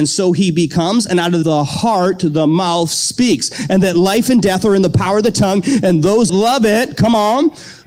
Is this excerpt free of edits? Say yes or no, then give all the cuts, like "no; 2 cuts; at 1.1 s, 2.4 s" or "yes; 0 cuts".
no; 2 cuts; at 1.4 s, 6.3 s